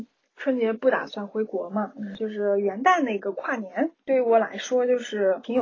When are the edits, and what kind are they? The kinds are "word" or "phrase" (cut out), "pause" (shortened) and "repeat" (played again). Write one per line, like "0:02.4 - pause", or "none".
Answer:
none

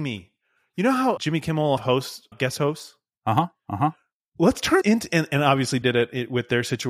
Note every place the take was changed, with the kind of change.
0:01.2 - word
0:01.8 - word
0:02.3 - word
0:04.8 - word
0:05.8 - word

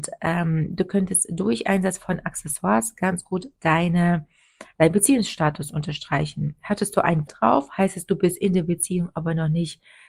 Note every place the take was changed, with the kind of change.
0:07.3 - word

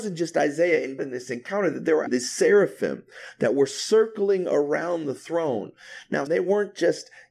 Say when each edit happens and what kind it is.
0:01.0 - word
0:02.1 - word
0:06.3 - word

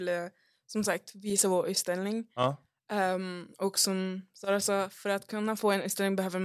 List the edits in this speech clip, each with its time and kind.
none

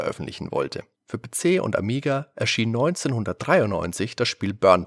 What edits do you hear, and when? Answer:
0:00.9 - pause

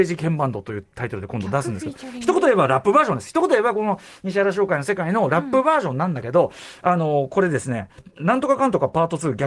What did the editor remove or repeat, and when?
none

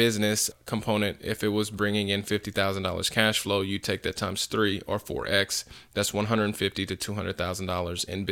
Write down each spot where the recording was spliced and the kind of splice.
none

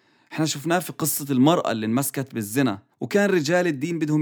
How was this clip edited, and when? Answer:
0:02.9 - pause

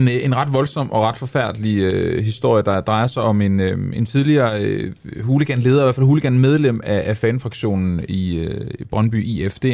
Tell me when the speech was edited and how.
none

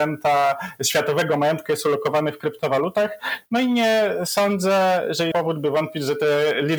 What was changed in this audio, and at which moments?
0:05.3 - word

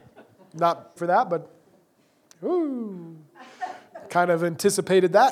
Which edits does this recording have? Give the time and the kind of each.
0:01.0 - word

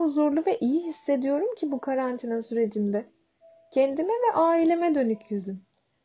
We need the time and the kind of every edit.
none

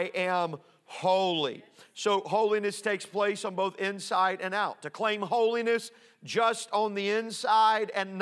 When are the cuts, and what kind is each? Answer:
none

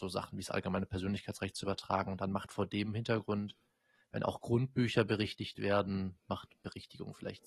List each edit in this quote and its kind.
none

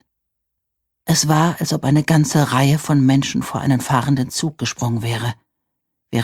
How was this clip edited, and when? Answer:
none

